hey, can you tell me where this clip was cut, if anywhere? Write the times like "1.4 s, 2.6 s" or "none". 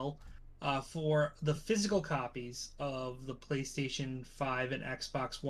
none